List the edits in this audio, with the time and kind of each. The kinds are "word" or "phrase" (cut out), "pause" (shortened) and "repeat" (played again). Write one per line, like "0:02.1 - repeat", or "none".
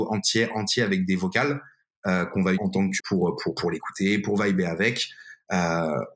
0:02.6 - word
0:03.0 - word